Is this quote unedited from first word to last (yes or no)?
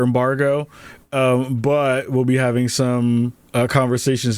yes